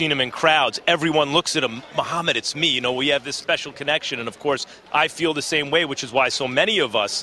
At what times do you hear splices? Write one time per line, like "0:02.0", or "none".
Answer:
none